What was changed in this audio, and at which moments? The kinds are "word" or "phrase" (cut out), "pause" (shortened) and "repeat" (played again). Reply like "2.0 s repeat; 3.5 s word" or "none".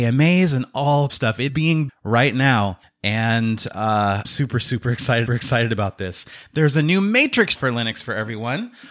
1.1 s phrase; 1.5 s word; 1.9 s word; 2.8 s pause; 4.2 s word; 5.3 s repeat; 7.5 s word